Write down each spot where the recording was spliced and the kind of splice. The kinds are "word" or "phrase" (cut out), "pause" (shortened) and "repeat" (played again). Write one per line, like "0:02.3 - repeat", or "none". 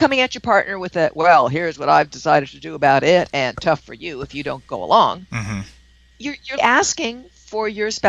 0:06.6 - word